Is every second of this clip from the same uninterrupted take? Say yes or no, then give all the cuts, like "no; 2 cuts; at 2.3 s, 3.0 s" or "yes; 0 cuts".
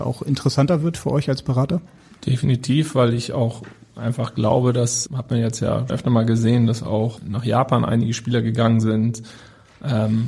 no; 3 cuts; at 5.1 s, 5.9 s, 7.2 s